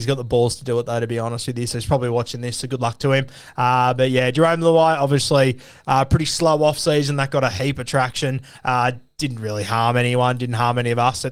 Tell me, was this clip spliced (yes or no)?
no